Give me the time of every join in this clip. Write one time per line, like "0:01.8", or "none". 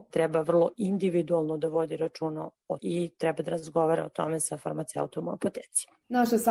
0:02.8